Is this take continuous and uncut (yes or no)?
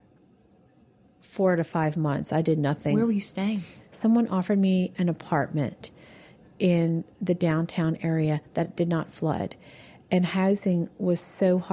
yes